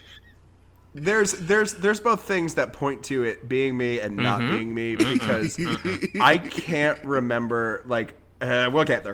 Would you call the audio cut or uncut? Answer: uncut